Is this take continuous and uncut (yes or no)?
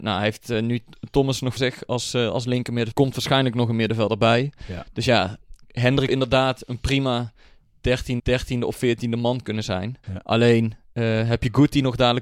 no